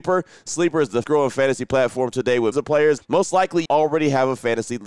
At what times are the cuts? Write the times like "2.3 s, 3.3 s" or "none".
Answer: 1.0 s, 2.5 s, 3.0 s, 3.7 s